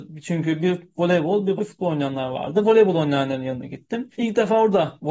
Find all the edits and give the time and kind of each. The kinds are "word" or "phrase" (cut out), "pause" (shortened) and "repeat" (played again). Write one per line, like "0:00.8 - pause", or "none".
0:01.6 - word
0:04.1 - pause